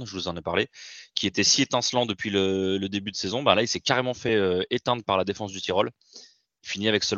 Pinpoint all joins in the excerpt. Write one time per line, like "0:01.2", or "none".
none

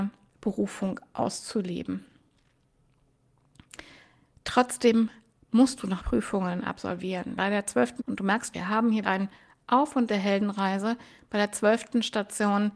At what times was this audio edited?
0:06.0
0:07.4
0:08.0
0:08.5
0:09.0
0:10.1

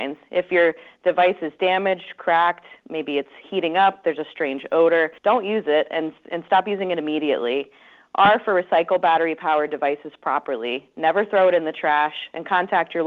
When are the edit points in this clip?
0:05.2

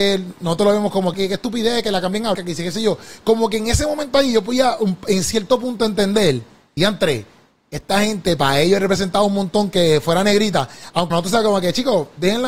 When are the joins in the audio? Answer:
0:01.1
0:02.3
0:06.8
0:11.1

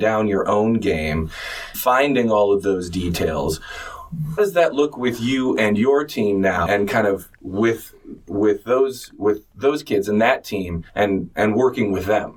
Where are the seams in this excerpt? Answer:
0:01.7
0:04.4
0:06.7
0:07.3
0:10.9

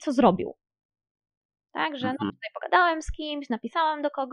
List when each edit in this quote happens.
0:02.3

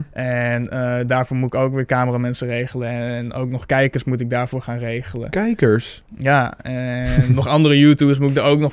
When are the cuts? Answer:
0:06.1

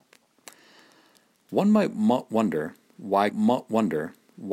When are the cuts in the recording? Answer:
0:03.3

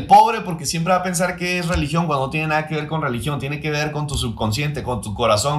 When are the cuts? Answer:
none

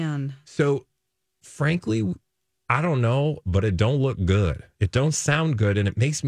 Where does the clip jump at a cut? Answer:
none

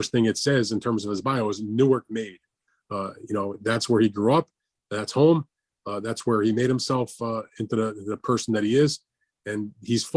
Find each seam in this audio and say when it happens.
none

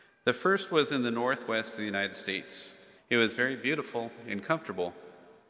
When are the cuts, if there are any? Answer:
0:03.0

